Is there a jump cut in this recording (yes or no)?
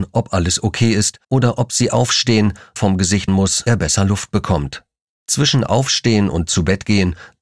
yes